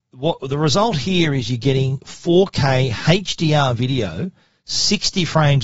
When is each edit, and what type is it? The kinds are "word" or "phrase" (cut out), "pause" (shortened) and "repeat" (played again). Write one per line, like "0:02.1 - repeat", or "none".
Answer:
none